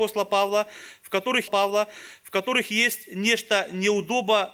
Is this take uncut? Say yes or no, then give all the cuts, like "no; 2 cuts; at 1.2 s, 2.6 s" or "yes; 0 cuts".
no; 1 cut; at 1.5 s